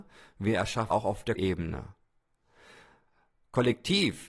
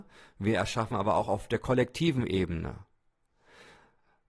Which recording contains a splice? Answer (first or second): first